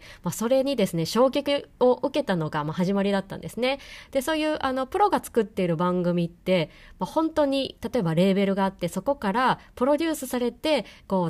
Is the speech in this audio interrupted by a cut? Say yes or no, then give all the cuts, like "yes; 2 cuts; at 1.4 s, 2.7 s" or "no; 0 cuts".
no; 0 cuts